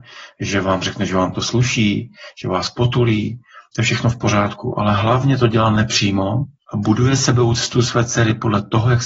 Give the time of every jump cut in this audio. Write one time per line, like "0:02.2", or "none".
none